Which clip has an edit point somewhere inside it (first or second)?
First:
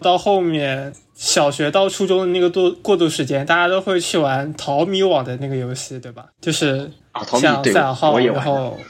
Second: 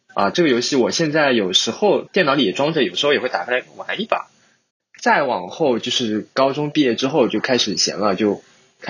first